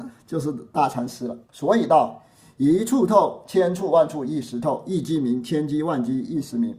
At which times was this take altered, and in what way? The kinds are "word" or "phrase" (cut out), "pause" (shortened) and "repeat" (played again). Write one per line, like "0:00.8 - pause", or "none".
0:01.4 - pause